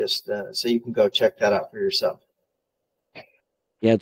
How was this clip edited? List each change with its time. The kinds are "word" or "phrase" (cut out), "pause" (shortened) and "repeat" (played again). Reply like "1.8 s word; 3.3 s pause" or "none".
none

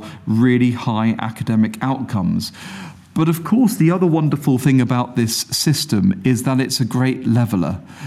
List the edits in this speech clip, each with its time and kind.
none

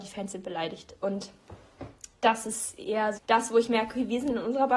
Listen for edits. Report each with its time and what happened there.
3.1 s word

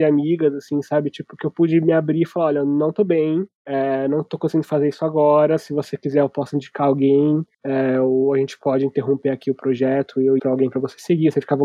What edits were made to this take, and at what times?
10.4 s word

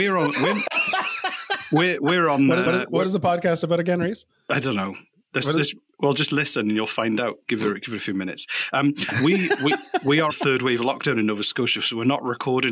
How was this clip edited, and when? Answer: 2.7 s repeat; 10.3 s phrase

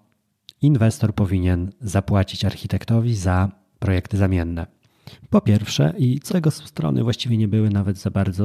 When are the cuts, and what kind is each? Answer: 6.3 s word

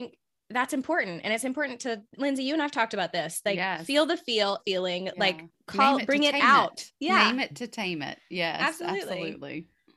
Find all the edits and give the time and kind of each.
2.1 s pause; 4.6 s phrase; 5.5 s pause; 6.9 s pause

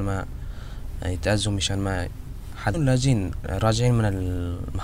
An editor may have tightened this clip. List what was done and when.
2.7 s phrase

